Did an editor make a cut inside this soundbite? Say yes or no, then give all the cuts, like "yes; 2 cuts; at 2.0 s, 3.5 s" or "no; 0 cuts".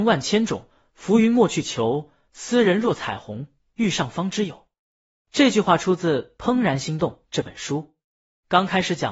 no; 0 cuts